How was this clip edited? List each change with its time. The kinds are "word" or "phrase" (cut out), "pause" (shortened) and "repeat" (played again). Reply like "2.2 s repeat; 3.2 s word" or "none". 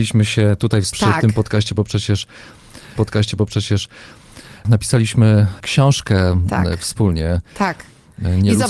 0.9 s word; 3.0 s repeat